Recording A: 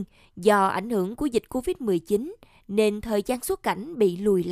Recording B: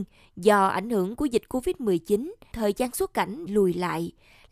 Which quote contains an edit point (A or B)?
B